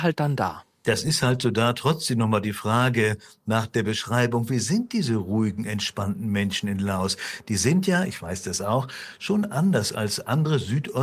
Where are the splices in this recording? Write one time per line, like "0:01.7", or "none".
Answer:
none